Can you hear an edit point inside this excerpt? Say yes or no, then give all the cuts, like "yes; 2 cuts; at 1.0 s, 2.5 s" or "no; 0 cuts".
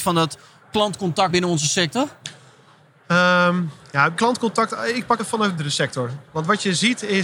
yes; 4 cuts; at 1.3 s, 4.2 s, 5.2 s, 5.6 s